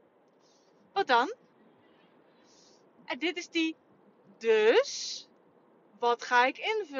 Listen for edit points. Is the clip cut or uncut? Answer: uncut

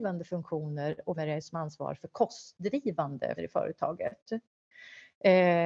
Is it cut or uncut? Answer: cut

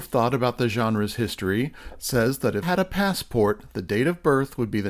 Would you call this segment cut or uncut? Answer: cut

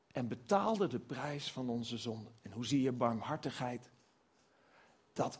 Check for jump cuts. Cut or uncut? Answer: cut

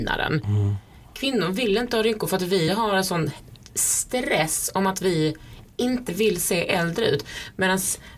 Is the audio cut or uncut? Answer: uncut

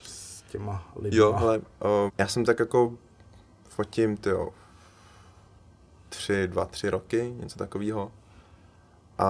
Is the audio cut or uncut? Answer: cut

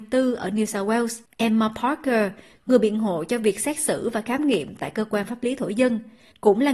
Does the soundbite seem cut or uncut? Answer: uncut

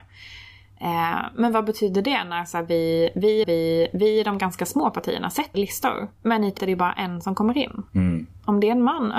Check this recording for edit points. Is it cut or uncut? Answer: cut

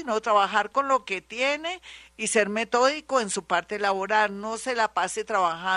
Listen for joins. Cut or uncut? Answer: uncut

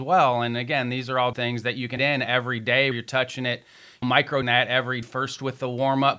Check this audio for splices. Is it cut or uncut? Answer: cut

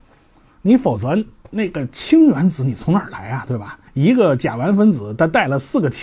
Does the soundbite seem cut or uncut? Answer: cut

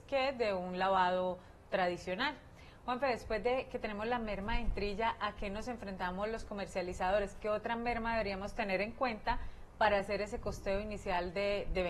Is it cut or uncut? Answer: uncut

